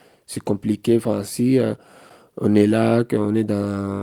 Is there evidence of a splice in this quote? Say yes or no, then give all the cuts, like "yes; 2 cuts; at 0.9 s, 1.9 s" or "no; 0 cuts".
no; 0 cuts